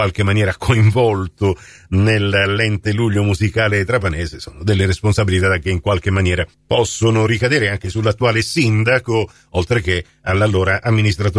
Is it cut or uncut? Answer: uncut